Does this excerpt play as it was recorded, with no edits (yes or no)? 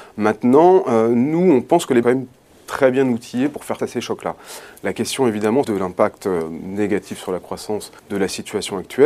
no